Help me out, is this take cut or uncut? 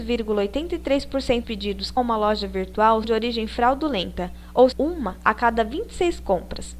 cut